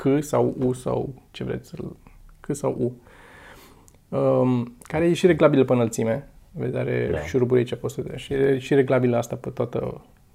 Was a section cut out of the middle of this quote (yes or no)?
no